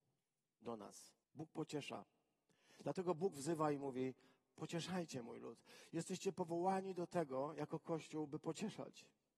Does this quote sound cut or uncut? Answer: cut